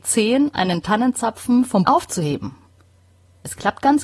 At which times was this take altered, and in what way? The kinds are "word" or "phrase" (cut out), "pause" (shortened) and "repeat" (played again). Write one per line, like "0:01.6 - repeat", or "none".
0:01.9 - word